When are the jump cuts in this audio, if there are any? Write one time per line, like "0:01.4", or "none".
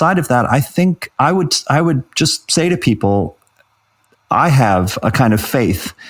none